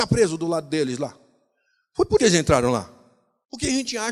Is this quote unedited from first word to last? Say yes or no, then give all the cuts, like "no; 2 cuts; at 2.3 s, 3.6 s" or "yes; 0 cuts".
no; 1 cut; at 2.2 s